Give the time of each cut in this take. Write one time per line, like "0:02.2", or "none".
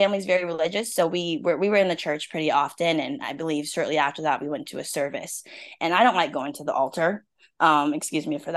none